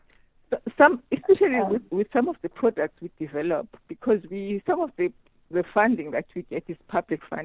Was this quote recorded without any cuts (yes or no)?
no